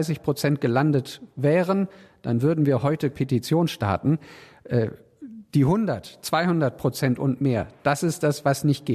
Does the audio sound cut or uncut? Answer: cut